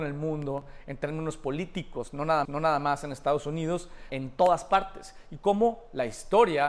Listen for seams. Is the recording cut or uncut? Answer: cut